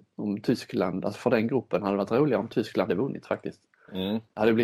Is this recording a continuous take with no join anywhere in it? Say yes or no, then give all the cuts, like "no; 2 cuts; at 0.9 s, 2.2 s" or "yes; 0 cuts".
no; 1 cut; at 2.9 s